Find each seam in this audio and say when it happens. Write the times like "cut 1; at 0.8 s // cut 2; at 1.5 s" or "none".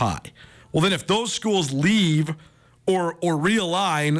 none